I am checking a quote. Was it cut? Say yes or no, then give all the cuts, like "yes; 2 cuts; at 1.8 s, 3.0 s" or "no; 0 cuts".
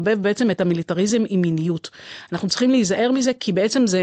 no; 0 cuts